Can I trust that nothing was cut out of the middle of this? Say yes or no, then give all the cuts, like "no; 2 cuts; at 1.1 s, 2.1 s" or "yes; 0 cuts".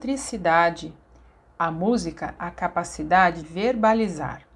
no; 2 cuts; at 2.4 s, 3.4 s